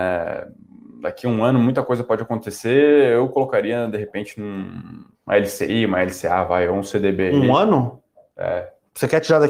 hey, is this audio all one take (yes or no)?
no